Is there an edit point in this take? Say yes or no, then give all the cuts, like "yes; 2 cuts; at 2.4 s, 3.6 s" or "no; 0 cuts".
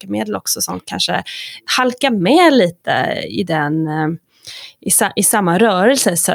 no; 0 cuts